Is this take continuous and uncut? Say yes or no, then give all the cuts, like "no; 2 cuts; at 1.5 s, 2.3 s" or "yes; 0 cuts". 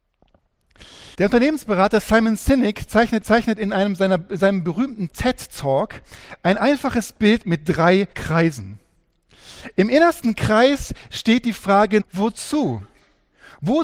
no; 4 cuts; at 1.1 s, 3.2 s, 8.1 s, 12.0 s